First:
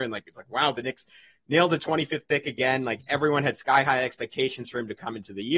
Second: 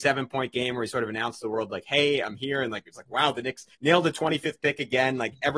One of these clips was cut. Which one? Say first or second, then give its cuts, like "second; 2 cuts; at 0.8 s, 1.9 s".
second; 1 cut; at 3.7 s